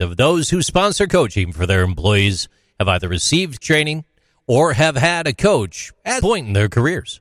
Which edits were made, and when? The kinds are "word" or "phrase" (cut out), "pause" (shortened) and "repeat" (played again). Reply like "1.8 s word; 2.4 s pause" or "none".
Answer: 3.6 s word; 6.2 s word